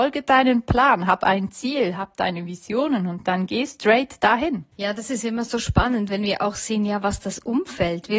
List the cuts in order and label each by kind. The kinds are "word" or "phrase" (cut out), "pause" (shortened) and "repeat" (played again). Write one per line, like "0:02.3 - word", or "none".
0:04.7 - pause